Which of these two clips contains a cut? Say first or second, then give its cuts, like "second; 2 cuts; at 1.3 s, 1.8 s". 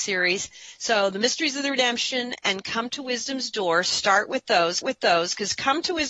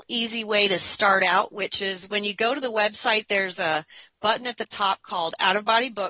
first; 1 cut; at 4.8 s